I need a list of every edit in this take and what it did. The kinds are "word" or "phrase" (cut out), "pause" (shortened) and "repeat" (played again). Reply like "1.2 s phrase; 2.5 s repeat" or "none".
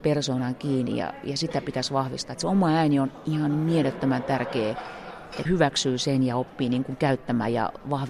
5.5 s word